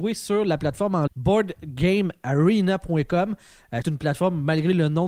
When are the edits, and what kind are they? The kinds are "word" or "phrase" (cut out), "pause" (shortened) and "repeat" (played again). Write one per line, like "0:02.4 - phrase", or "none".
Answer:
0:01.1 - word
0:03.8 - word